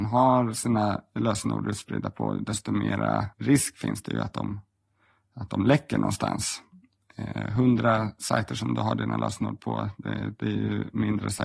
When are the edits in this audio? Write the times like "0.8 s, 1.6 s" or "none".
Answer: 3.3 s